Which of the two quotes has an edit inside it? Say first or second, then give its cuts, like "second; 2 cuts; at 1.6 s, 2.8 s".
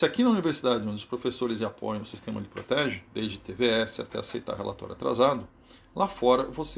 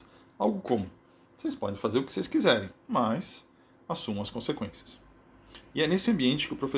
first; 1 cut; at 3.1 s